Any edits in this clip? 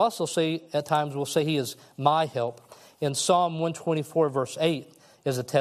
no; 0 cuts

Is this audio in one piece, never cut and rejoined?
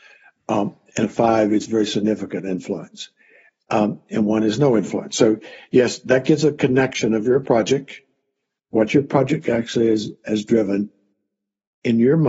yes; 0 cuts

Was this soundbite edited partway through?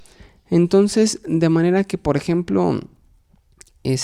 no; 0 cuts

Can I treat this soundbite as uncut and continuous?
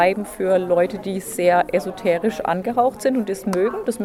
yes; 0 cuts

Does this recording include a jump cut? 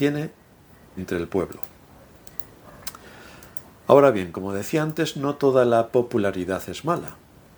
yes; 1 cut; at 1.0 s

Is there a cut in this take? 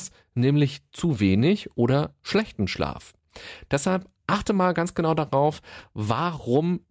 no; 0 cuts

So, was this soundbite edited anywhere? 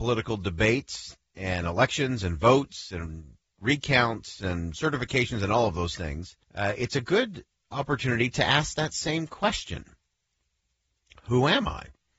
yes; 1 cut; at 6.4 s

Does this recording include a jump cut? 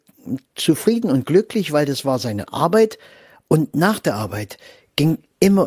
no; 0 cuts

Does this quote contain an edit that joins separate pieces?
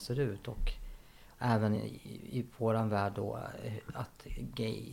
no; 0 cuts

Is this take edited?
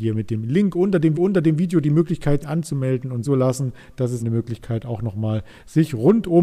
yes; 4 cuts; at 1.1 s, 2.4 s, 3.2 s, 4.2 s

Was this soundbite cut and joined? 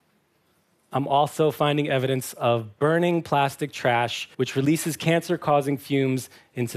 yes; 1 cut; at 4.3 s

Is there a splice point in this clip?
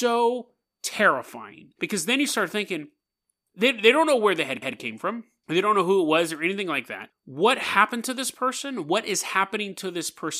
yes; 1 cut; at 4.6 s

